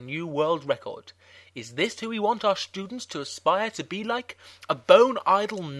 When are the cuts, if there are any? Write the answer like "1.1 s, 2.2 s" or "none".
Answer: none